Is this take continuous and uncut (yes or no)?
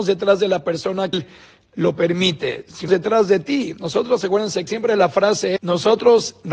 no